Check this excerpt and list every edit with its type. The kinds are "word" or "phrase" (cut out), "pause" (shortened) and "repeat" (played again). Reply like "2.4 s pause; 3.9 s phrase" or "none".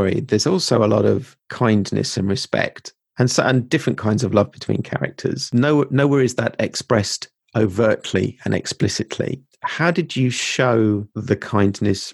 none